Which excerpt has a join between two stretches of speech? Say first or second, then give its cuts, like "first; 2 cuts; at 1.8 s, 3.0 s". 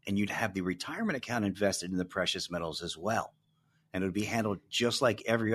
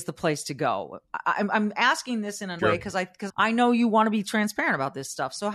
second; 2 cuts; at 2.6 s, 3.3 s